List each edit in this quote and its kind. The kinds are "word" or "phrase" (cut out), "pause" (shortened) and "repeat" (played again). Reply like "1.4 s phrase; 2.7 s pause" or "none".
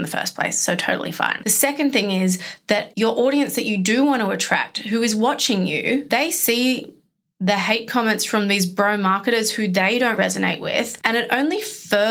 10.2 s word